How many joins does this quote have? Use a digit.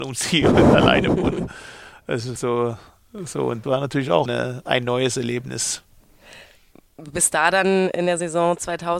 3